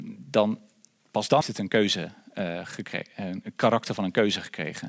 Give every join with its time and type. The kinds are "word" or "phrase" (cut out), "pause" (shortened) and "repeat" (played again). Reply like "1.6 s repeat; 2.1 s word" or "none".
1.4 s phrase